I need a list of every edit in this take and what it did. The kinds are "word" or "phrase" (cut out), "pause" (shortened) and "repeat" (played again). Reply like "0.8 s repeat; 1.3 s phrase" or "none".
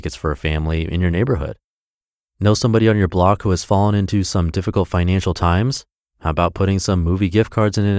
none

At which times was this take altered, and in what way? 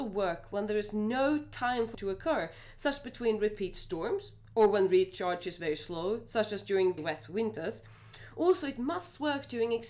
1.9 s word; 7.0 s word

